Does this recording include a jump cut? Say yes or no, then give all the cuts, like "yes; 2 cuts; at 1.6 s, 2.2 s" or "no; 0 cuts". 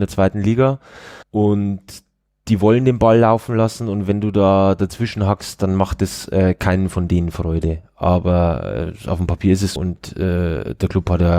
yes; 2 cuts; at 1.2 s, 9.8 s